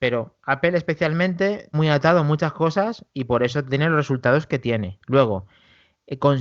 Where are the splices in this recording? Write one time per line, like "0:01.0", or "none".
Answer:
0:01.7